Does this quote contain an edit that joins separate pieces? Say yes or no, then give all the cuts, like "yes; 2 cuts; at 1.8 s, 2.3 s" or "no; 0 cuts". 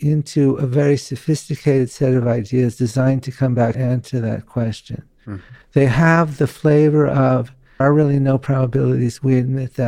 yes; 3 cuts; at 3.7 s, 5.6 s, 7.8 s